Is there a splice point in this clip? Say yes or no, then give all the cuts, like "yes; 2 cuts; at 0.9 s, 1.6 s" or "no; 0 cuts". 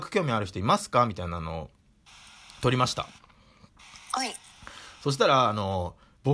no; 0 cuts